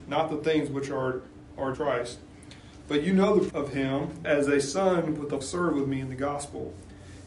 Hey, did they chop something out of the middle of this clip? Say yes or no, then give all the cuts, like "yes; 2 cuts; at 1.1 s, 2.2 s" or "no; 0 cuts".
yes; 4 cuts; at 1.7 s, 3.5 s, 4.2 s, 5.4 s